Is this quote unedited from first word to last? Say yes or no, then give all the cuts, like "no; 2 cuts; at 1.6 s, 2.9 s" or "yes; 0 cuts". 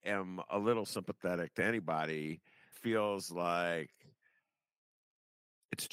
no; 1 cut; at 2.7 s